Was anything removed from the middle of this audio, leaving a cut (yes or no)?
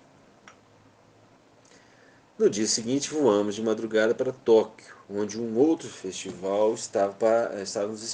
yes